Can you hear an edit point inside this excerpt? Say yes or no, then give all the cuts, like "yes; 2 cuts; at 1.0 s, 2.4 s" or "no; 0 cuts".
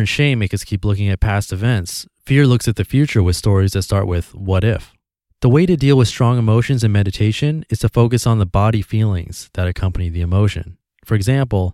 no; 0 cuts